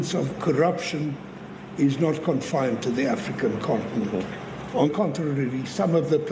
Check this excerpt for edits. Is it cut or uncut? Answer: cut